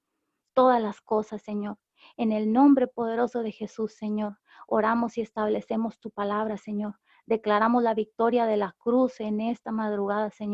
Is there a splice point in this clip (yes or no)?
no